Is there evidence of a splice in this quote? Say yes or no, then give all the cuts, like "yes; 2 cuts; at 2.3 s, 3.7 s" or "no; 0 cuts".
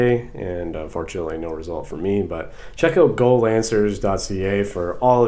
no; 0 cuts